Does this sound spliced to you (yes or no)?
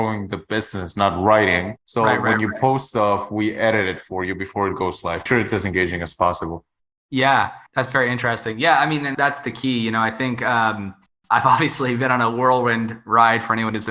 yes